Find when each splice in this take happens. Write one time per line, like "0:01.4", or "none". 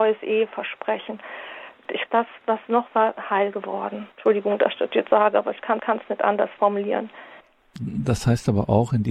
0:02.1
0:02.9
0:04.1
0:05.1
0:05.8
0:07.4